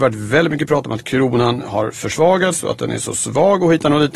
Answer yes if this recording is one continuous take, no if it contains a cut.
yes